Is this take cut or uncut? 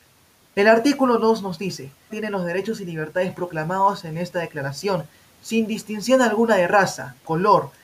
cut